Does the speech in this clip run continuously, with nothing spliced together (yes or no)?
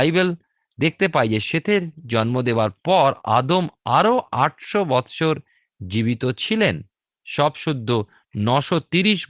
yes